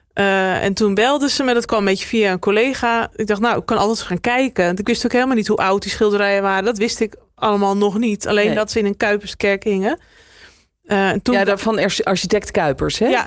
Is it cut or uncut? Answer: uncut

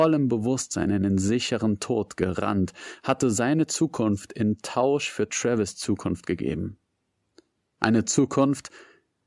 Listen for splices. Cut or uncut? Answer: uncut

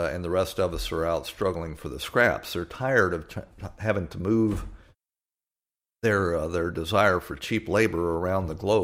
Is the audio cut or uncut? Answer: uncut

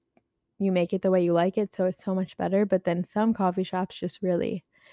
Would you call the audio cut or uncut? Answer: uncut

